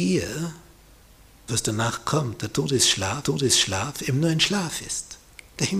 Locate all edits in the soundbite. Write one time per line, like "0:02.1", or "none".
0:01.5
0:03.2